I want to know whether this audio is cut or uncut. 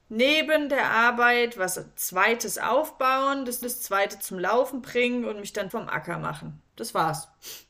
cut